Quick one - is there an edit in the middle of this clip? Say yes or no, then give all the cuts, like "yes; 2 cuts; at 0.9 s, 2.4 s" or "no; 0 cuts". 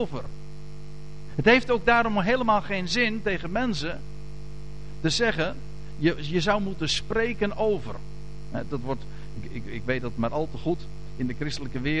no; 0 cuts